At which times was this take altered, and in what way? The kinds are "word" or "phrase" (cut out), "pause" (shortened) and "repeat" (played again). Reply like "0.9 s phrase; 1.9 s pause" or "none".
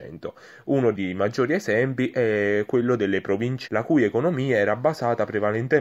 0.9 s word; 3.7 s word